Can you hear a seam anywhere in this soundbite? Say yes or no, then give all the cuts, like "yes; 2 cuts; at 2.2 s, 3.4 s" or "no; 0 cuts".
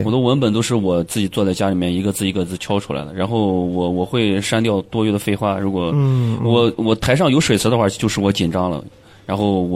no; 0 cuts